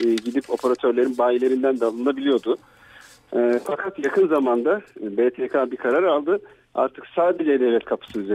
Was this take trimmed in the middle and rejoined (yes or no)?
no